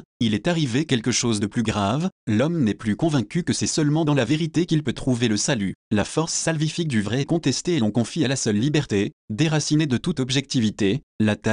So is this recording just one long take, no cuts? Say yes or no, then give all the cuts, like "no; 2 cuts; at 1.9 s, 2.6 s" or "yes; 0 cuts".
yes; 0 cuts